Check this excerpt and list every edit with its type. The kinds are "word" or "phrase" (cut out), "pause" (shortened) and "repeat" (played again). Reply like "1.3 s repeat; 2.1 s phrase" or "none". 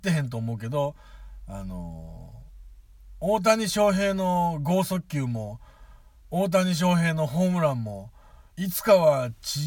6.2 s pause; 8.5 s pause

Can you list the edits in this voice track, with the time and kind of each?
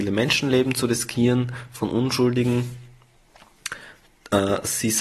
none

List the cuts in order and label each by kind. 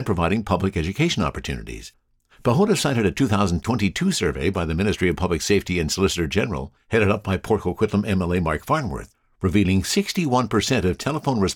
none

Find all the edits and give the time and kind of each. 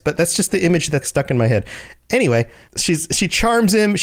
1.0 s word; 2.7 s word

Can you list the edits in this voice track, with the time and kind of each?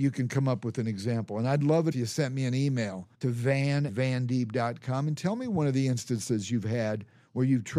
1.9 s word; 3.1 s pause; 3.9 s word

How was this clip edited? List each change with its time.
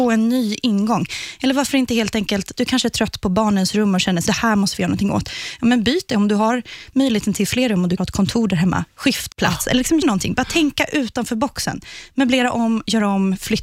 4.3 s word; 8.0 s word; 9.3 s word; 10.0 s word

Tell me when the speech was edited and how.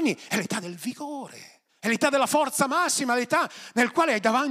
1.7 s pause

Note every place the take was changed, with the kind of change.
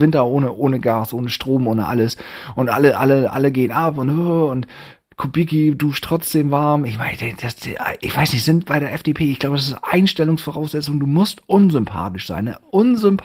none

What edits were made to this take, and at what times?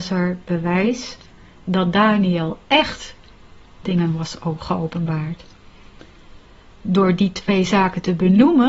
3.8 s word

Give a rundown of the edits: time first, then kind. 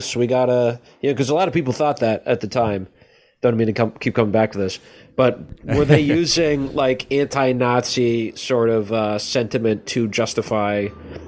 none

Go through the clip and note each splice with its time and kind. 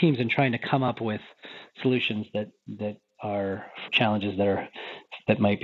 2.5 s word; 3.9 s word

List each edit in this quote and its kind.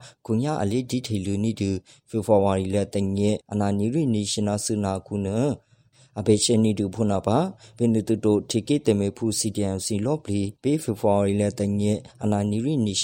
3.4 s pause

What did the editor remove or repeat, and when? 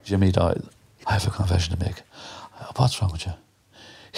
1.0 s word

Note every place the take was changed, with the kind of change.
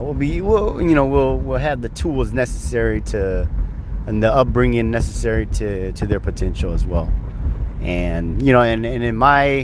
6.0 s phrase; 8.3 s word

